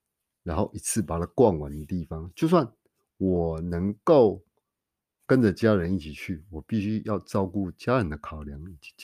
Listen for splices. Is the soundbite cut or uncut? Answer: uncut